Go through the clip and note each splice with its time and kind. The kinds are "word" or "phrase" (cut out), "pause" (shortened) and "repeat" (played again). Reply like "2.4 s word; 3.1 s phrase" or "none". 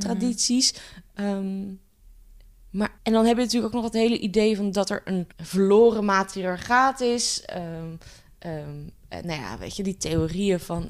3.0 s pause; 5.3 s pause